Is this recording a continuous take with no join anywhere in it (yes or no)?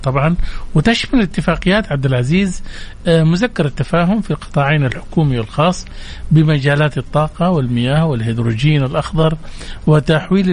yes